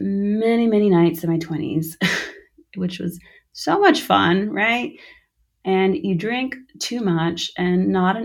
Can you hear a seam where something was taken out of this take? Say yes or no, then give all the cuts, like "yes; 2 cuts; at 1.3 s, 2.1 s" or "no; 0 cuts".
no; 0 cuts